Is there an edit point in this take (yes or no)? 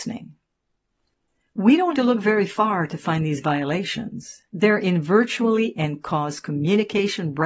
yes